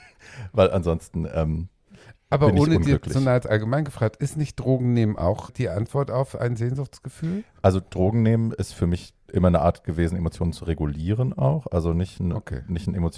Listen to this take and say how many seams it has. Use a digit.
2